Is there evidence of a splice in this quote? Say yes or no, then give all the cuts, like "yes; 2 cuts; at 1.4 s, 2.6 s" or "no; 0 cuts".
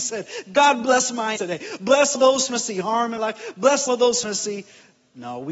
yes; 6 cuts; at 1.4 s, 2.1 s, 2.5 s, 3.2 s, 3.9 s, 4.2 s